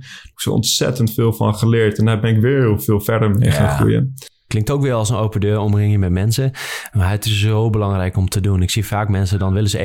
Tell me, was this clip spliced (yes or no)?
no